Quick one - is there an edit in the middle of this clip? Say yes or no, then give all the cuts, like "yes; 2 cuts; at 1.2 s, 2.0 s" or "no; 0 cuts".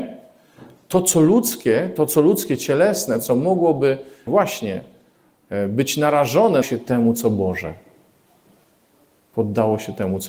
yes; 2 cuts; at 4.3 s, 6.6 s